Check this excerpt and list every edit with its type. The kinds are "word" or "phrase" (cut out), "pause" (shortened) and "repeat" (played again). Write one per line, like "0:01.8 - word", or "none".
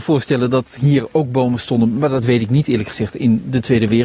none